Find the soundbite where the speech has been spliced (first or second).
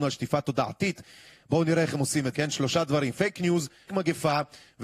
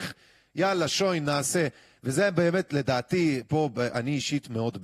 first